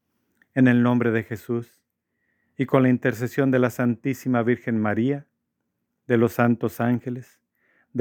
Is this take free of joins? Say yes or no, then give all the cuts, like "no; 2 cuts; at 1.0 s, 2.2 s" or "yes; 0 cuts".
yes; 0 cuts